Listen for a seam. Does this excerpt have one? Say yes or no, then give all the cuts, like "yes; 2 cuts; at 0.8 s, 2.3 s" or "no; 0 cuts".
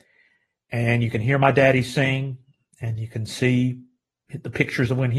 no; 0 cuts